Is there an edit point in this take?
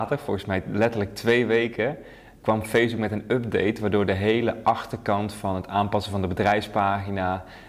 no; 0 cuts

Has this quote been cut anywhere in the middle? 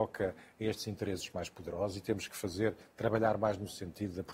no; 0 cuts

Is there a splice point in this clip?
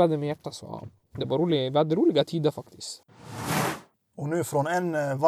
no; 0 cuts

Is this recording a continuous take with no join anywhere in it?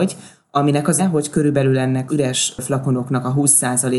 no; 2 cuts; at 1.0 s, 2.1 s

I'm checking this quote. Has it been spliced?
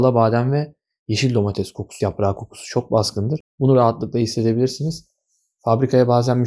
yes; 2 cuts; at 2.0 s, 3.5 s

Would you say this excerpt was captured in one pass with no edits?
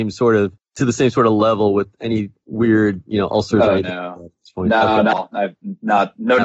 yes; 0 cuts

